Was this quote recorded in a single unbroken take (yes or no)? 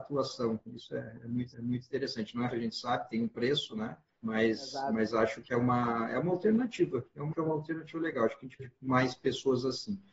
no